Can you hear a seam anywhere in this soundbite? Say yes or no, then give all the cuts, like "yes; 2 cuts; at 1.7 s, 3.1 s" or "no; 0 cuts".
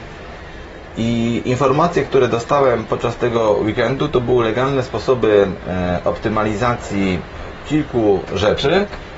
no; 0 cuts